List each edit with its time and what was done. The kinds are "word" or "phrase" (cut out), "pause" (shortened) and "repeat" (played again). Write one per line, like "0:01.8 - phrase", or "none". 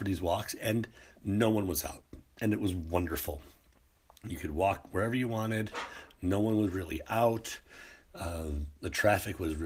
none